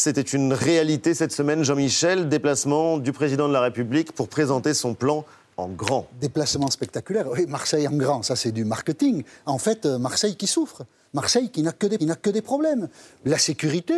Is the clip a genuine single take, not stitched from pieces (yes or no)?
no